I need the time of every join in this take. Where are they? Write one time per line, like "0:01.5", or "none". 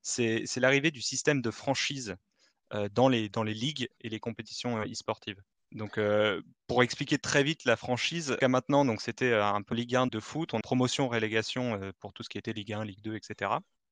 0:05.5
0:08.4
0:09.7
0:10.1
0:10.6